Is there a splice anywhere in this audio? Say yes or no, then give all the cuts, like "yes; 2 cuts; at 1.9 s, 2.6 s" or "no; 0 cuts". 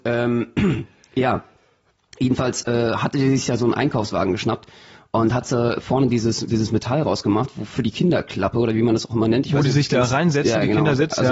no; 0 cuts